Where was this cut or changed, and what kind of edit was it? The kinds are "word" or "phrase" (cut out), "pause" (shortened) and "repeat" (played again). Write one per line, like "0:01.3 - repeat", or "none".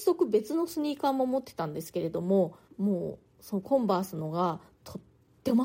0:02.7 - pause